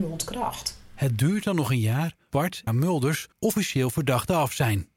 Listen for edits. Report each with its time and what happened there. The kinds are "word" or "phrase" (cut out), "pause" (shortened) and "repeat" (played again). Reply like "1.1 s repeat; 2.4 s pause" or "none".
2.3 s word; 2.7 s phrase; 3.3 s pause

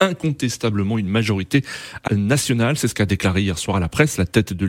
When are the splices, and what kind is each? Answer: 2.1 s word

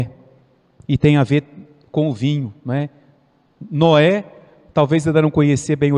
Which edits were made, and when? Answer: none

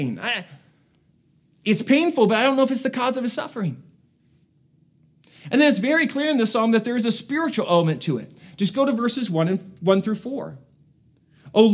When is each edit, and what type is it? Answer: none

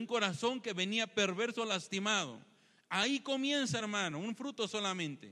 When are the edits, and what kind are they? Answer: none

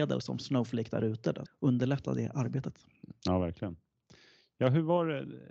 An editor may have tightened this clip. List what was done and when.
1.5 s word

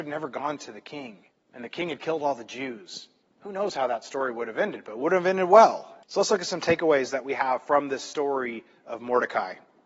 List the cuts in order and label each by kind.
1.3 s pause; 3.2 s pause; 6.0 s pause

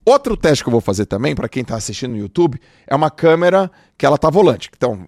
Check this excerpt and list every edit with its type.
none

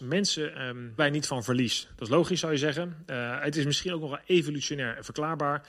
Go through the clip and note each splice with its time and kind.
1.0 s word

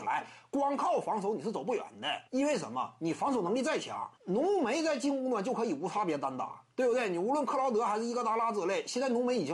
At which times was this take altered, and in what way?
2.3 s pause; 4.2 s pause

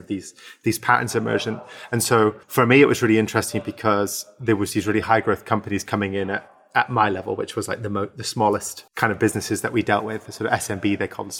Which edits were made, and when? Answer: 2.4 s pause; 8.9 s pause

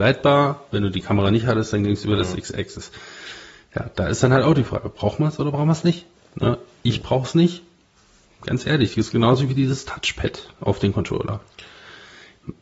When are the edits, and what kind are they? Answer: none

